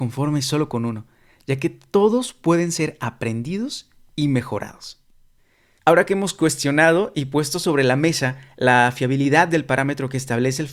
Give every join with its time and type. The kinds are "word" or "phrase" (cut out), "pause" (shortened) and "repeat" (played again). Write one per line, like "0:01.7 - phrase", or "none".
none

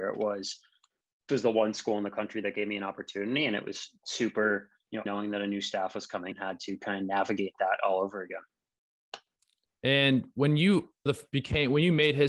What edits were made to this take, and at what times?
0:01.3 - word
0:05.1 - word
0:06.3 - word
0:11.1 - word

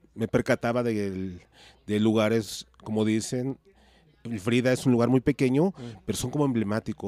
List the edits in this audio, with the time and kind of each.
none

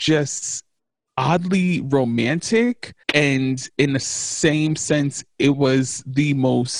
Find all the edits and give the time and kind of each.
0:03.0 - pause

